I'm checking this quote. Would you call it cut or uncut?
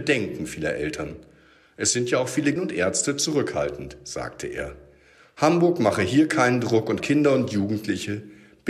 cut